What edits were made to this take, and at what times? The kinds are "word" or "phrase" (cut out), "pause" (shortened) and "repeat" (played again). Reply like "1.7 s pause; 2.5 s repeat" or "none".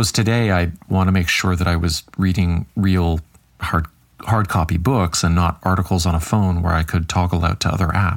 2.7 s word